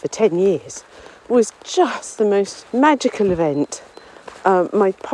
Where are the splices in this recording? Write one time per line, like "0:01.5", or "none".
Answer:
0:02.7